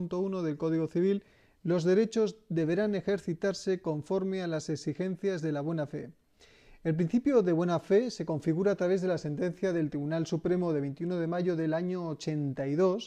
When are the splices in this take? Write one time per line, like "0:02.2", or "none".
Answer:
none